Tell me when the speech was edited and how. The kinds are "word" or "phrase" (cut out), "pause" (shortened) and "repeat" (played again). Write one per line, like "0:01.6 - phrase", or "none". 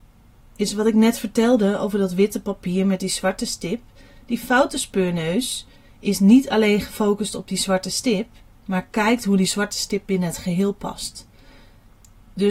none